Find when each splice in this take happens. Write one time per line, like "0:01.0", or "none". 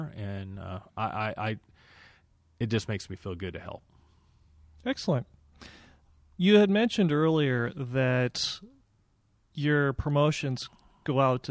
none